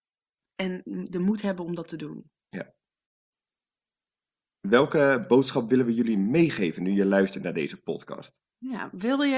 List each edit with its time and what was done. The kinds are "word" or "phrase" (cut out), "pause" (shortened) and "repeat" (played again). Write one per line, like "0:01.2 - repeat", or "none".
none